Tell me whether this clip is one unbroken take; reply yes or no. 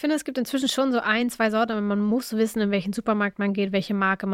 yes